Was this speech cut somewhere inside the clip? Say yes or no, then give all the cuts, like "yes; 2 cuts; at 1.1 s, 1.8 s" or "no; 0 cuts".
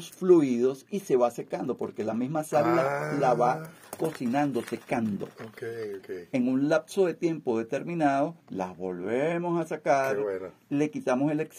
yes; 1 cut; at 8.4 s